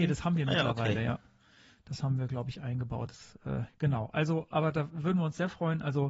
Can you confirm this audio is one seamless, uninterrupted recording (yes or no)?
no